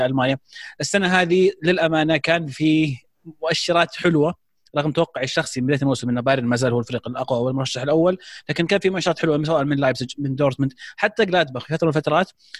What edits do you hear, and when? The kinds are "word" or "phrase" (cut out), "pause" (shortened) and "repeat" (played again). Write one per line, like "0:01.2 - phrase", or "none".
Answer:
none

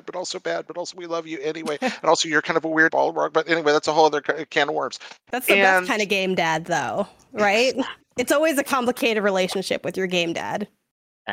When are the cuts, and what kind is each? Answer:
0:02.9 - phrase

